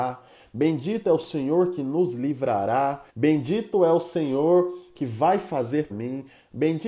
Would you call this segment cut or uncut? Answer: cut